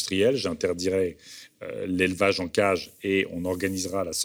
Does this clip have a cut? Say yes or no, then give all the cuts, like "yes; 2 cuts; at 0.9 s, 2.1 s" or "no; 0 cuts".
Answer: no; 0 cuts